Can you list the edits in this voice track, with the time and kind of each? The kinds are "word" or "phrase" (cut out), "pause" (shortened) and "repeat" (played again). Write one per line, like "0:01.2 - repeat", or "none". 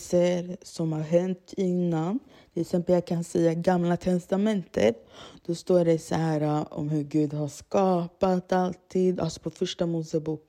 none

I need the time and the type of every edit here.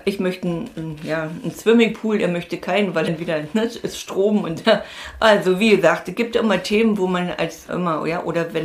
0:03.1 - word
0:04.6 - word
0:07.7 - word

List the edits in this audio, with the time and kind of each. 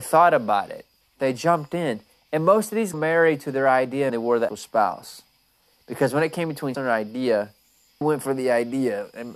0:01.0 - pause
0:02.9 - phrase
0:04.1 - phrase
0:04.5 - word
0:06.7 - word
0:08.0 - word

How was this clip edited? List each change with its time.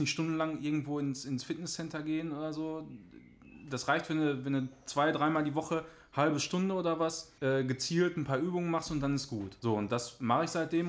0:07.4 - pause
0:09.6 - pause

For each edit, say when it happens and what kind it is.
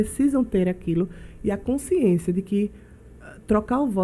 none

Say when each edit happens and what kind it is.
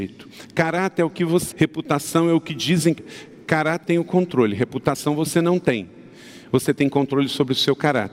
0:01.5 - word
0:03.0 - word
0:03.8 - word

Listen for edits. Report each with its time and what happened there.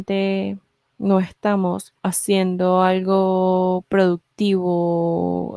0:02.0 - pause

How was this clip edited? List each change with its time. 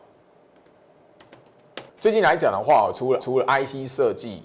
0:01.9 - pause
0:03.2 - repeat

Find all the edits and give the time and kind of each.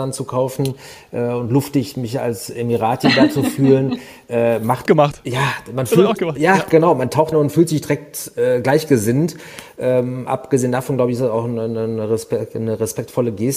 0:04.9 - phrase
0:07.3 - phrase

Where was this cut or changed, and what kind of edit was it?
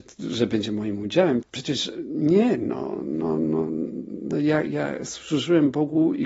0:01.4 - word

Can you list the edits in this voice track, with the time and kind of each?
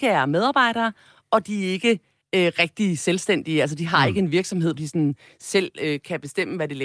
0:04.8 - word

